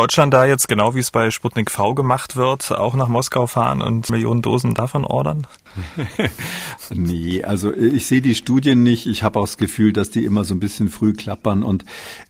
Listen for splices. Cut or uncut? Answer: uncut